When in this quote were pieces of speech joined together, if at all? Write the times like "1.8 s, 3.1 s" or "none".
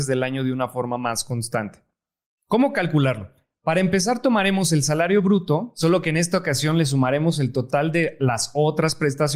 none